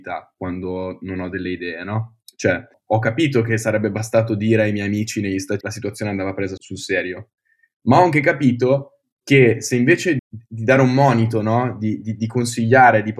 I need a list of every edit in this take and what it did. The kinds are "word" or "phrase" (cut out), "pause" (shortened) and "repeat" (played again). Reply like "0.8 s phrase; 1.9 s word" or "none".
5.6 s phrase; 6.6 s word; 10.2 s word